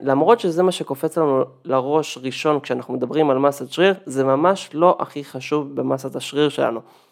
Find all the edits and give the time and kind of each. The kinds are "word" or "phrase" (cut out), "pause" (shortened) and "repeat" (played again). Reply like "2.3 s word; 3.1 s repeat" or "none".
none